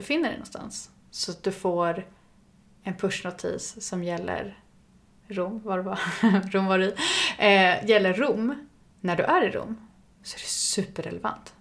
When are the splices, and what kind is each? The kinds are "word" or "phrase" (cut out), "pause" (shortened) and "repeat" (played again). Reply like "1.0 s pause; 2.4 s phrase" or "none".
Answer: none